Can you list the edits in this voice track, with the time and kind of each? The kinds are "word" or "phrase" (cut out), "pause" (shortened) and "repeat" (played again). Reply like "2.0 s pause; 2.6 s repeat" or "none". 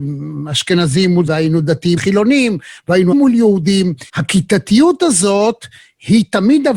1.3 s word; 2.0 s word; 3.1 s word; 4.1 s pause

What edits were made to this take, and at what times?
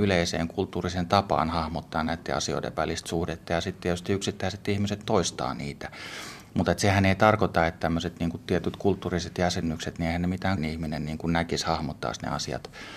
5.0 s word; 10.6 s phrase

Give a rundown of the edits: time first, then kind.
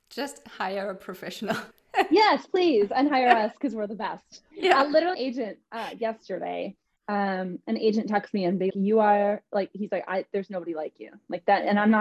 1.7 s pause; 5.1 s phrase; 8.7 s word

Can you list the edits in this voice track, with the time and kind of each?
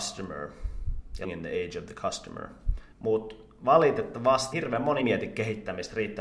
1.2 s word; 2.9 s pause; 4.5 s word; 5.0 s word

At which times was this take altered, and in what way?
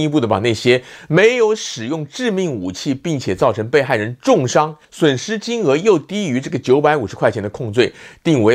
4.8 s pause

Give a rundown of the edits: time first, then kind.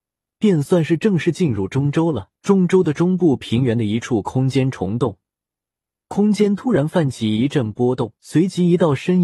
2.4 s pause; 8.2 s pause

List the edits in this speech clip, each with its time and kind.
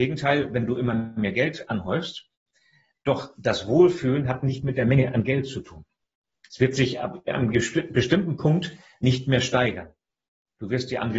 none

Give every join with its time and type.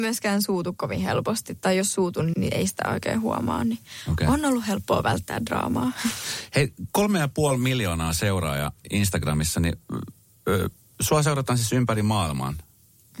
2.3 s word

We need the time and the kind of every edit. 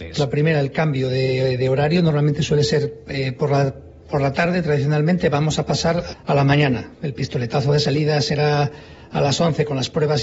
6.1 s word

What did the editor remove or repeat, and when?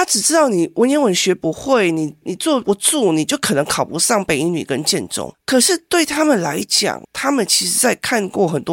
7.0 s pause

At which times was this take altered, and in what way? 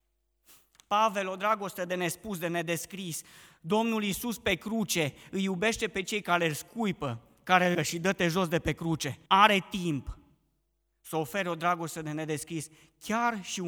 7.7 s phrase; 9.3 s pause

